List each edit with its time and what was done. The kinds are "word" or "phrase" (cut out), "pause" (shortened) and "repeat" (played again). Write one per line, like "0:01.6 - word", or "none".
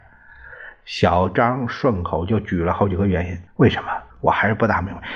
0:03.5 - pause
0:04.1 - pause